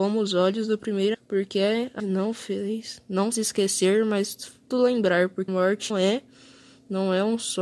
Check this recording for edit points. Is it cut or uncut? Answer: cut